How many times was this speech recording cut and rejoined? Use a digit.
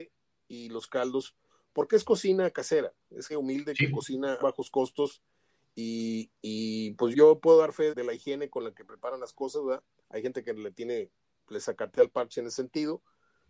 4